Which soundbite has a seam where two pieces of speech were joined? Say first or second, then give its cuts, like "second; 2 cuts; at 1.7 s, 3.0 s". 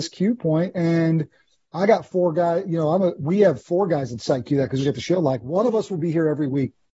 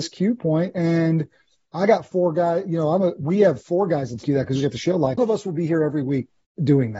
second; 2 cuts; at 4.2 s, 5.2 s